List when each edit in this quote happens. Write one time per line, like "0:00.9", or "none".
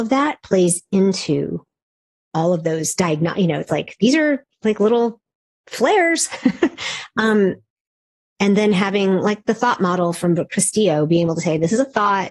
none

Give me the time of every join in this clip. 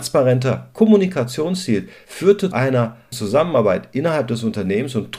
0:02.5
0:03.1

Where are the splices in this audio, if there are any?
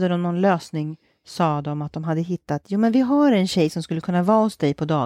none

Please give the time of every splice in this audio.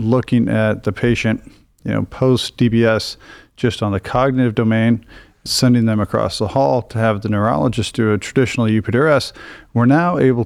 0:05.5

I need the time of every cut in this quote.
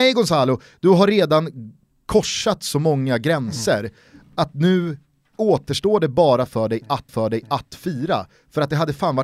0:07.1

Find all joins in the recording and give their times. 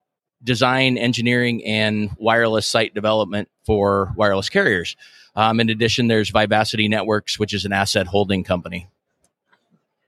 none

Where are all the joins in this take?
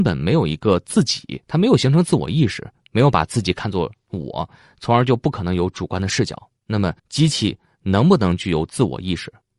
0:01.4
0:06.6
0:07.0

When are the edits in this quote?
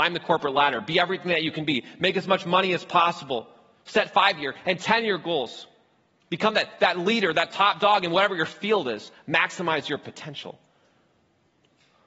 none

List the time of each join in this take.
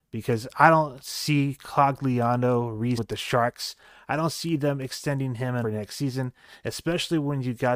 0:03.0
0:05.6

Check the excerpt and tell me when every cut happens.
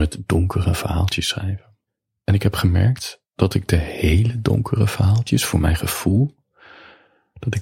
0:01.9
0:03.2

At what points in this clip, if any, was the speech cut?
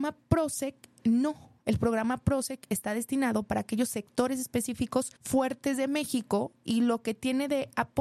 0:05.2

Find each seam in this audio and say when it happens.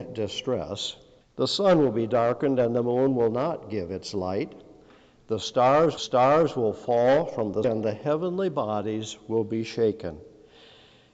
0:01.2
0:06.0
0:07.6

